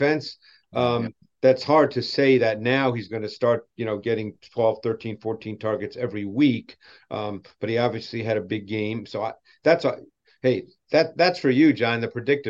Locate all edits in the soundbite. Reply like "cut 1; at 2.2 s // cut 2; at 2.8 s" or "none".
none